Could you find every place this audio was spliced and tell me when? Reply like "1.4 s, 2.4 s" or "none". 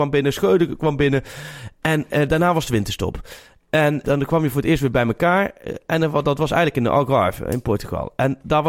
4.0 s